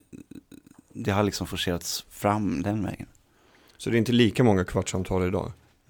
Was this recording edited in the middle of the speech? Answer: no; 0 cuts

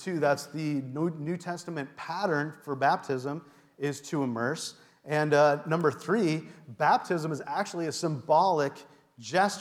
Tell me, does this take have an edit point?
no; 0 cuts

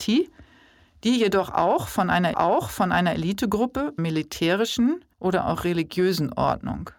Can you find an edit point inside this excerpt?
yes; 3 cuts; at 2.3 s, 4.0 s, 5.1 s

